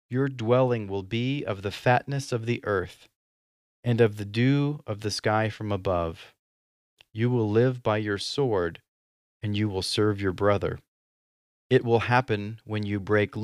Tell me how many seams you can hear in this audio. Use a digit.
0